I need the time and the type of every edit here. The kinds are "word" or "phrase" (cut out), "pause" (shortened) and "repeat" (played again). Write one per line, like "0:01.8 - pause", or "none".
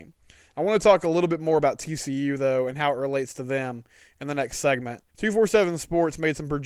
0:05.1 - pause